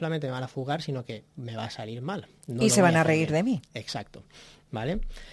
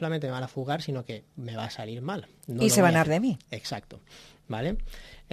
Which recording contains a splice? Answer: second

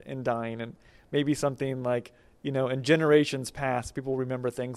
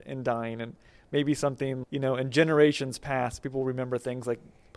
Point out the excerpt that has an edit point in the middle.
second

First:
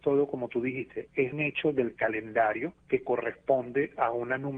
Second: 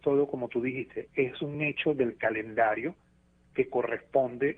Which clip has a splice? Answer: first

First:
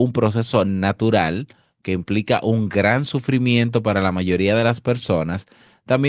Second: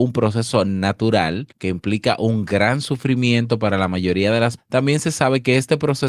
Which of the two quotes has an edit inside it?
second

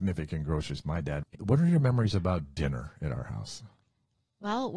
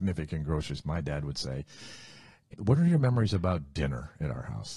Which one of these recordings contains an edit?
first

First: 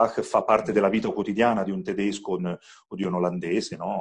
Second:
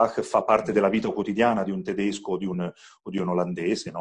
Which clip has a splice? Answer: first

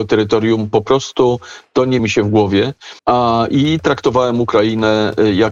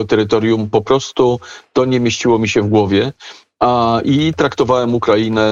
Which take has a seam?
first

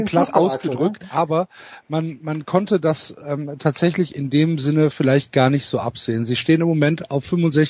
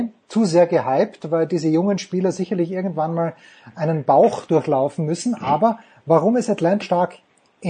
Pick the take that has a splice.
second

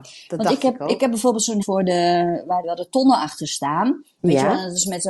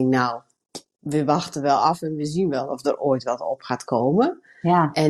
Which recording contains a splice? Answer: first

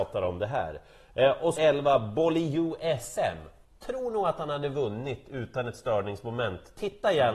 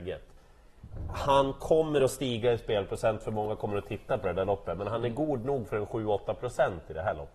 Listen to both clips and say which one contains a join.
first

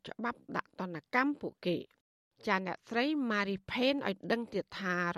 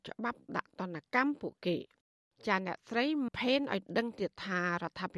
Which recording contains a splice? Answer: second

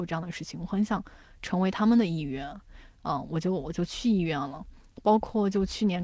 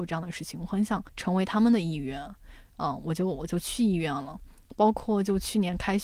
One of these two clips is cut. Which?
second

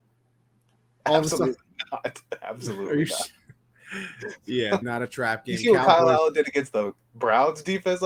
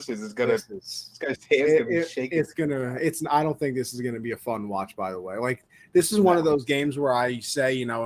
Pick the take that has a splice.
first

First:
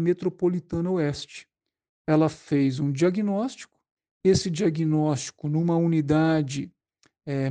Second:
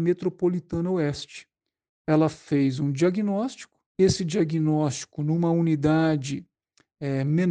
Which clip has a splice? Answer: second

